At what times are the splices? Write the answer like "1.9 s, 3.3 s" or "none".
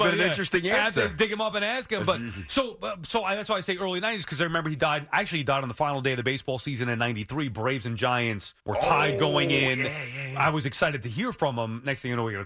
8.6 s